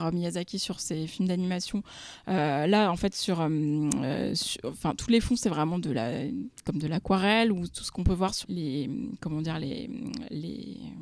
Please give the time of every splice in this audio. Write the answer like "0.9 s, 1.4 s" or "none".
8.4 s